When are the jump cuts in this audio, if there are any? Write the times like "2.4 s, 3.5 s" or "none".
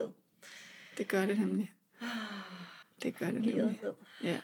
2.8 s